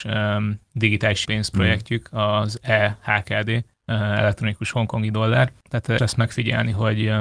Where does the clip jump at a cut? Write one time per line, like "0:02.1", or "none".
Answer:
0:01.2
0:03.7
0:06.0